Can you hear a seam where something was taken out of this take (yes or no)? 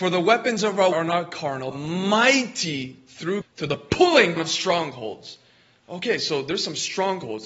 yes